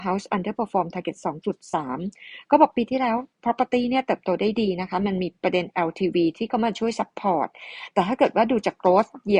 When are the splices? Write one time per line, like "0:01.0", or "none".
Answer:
0:03.3
0:05.4